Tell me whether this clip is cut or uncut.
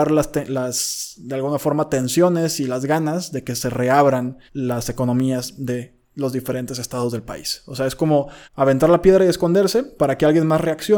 cut